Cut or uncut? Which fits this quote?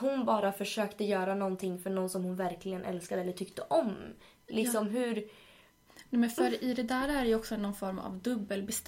uncut